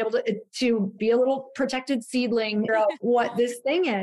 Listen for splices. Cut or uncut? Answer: cut